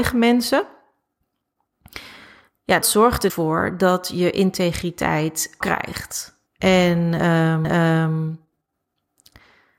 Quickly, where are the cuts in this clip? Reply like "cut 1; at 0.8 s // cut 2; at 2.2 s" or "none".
cut 1; at 2.8 s // cut 2; at 3.3 s // cut 3; at 5.6 s // cut 4; at 6.5 s // cut 5; at 7.6 s